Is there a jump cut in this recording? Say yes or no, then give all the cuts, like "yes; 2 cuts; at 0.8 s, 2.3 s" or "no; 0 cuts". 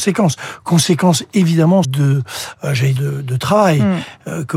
yes; 2 cuts; at 1.8 s, 3.0 s